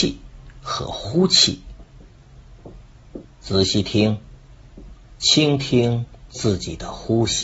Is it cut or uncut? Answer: cut